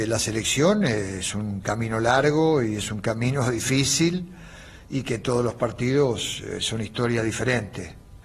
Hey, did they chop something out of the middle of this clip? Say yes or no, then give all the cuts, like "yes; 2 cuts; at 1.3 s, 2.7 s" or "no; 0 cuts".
no; 0 cuts